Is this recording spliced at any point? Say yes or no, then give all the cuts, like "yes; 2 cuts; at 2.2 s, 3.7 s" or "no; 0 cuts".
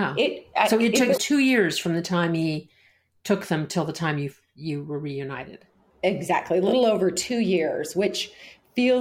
yes; 1 cut; at 1.2 s